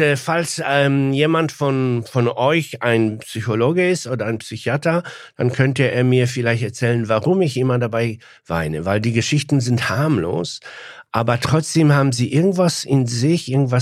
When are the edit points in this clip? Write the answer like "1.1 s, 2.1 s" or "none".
none